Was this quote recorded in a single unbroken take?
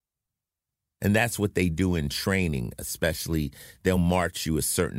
yes; 0 cuts

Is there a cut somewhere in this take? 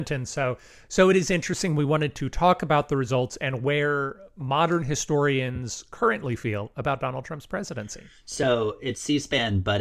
no; 0 cuts

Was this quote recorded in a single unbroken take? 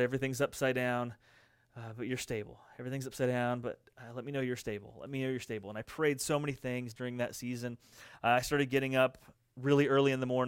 yes; 0 cuts

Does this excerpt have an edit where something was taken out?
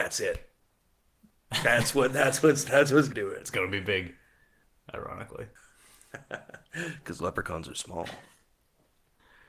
yes; 1 cut; at 3.1 s

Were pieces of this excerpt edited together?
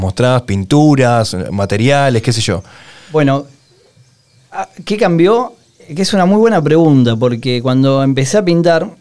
no; 0 cuts

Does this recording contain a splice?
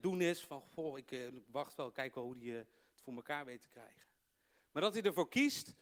no; 0 cuts

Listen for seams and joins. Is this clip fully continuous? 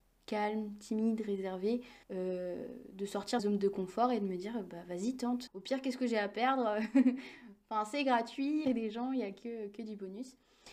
no; 4 cuts; at 2.0 s, 3.4 s, 5.5 s, 8.6 s

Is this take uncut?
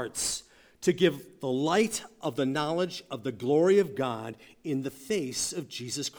yes; 0 cuts

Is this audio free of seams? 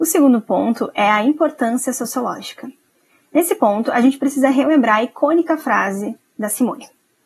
yes; 0 cuts

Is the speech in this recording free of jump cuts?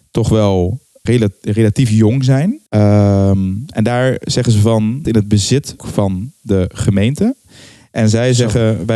no; 4 cuts; at 1.1 s, 2.7 s, 5.0 s, 5.8 s

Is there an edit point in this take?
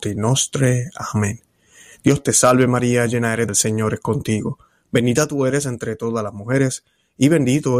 yes; 1 cut; at 3.5 s

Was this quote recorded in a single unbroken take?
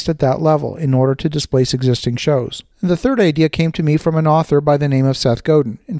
no; 1 cut; at 2.7 s

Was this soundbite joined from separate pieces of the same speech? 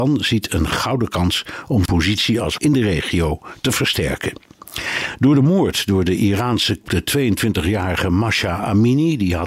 yes; 3 cuts; at 1.8 s, 2.6 s, 6.8 s

